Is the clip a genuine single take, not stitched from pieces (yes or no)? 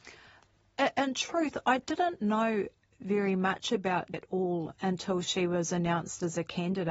no